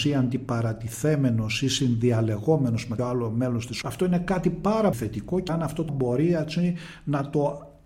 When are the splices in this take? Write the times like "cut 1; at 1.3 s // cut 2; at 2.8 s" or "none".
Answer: cut 1; at 3.0 s // cut 2; at 3.8 s // cut 3; at 4.9 s // cut 4; at 5.5 s // cut 5; at 5.9 s

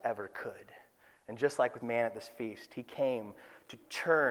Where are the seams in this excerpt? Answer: cut 1; at 1.8 s

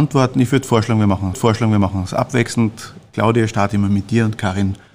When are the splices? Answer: cut 1; at 1.3 s

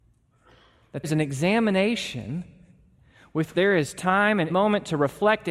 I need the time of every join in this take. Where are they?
cut 1; at 1.0 s // cut 2; at 3.5 s // cut 3; at 4.5 s

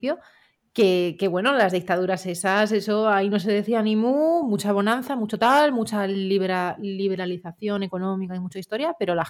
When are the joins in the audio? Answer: none

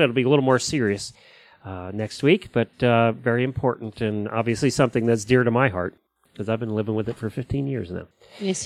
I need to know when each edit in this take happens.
none

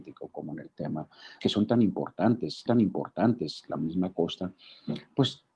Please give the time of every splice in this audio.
cut 1; at 1.4 s // cut 2; at 2.7 s

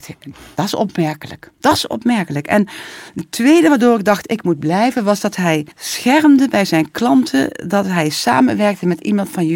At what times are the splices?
cut 1; at 5.7 s

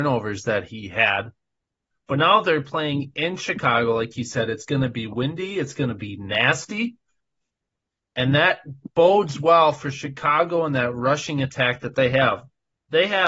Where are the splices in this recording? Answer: none

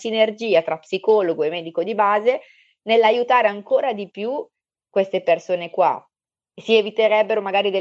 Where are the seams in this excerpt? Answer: none

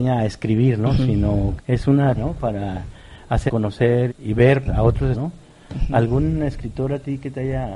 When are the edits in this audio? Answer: cut 1; at 1.6 s // cut 2; at 2.2 s // cut 3; at 3.5 s // cut 4; at 4.1 s // cut 5; at 4.7 s // cut 6; at 5.1 s

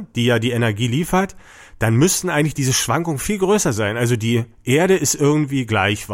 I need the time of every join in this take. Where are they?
none

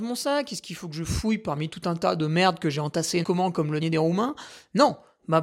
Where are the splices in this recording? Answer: cut 1; at 3.2 s // cut 2; at 3.8 s

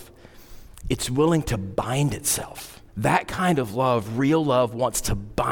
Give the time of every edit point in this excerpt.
cut 1; at 2.9 s

